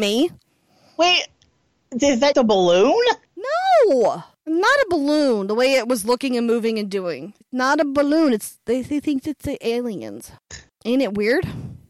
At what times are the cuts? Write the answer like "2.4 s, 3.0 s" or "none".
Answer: 2.3 s, 3.2 s